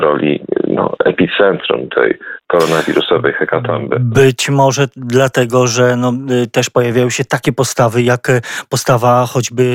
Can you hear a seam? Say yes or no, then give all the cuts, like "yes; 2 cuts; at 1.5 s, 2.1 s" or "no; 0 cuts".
no; 0 cuts